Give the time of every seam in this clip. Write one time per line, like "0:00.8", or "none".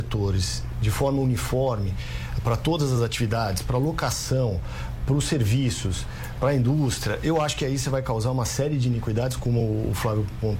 none